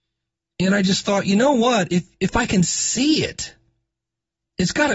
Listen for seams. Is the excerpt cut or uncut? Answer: uncut